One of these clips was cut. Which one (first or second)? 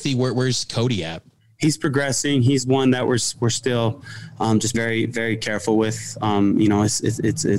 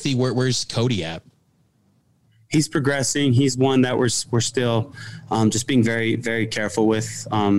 first